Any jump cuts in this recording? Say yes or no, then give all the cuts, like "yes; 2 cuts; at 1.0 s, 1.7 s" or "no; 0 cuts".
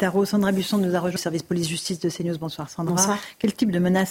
yes; 1 cut; at 1.2 s